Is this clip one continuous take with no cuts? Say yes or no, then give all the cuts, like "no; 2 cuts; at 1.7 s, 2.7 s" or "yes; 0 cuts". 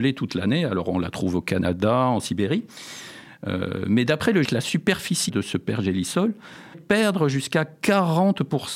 no; 3 cuts; at 4.4 s, 5.3 s, 6.7 s